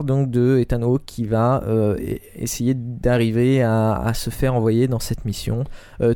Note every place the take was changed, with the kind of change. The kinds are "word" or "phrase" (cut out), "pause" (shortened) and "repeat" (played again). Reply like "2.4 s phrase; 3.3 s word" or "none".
none